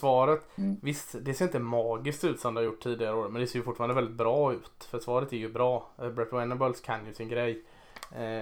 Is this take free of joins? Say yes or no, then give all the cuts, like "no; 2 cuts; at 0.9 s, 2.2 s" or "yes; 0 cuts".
yes; 0 cuts